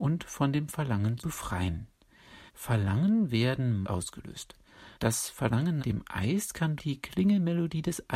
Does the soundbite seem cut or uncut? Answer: cut